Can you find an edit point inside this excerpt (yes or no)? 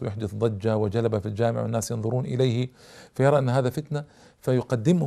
no